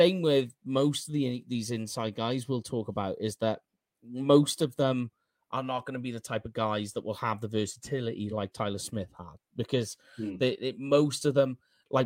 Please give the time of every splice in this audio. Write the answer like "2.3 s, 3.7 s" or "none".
none